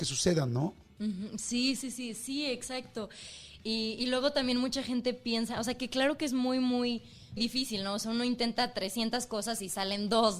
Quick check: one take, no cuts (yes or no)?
no